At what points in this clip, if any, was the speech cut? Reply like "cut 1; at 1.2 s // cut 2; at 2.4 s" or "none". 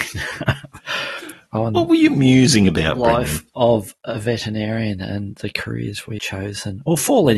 cut 1; at 6.2 s